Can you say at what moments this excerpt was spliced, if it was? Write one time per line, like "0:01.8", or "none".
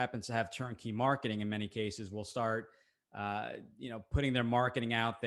none